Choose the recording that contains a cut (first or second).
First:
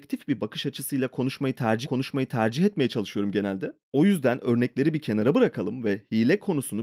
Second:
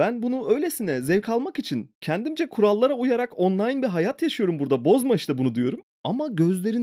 first